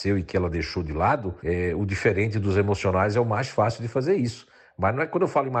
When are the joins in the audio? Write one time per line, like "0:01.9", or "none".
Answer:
0:01.4